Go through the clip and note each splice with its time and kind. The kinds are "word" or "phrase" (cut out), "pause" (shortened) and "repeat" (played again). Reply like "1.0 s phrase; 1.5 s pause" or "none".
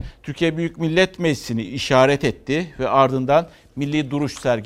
none